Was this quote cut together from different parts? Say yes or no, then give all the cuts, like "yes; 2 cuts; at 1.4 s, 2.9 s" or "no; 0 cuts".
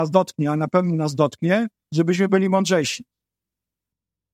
no; 0 cuts